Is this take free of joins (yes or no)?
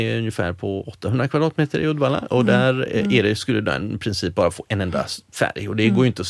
yes